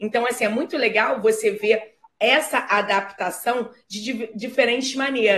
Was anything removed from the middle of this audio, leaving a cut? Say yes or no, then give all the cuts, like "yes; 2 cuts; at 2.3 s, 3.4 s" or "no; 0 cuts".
no; 0 cuts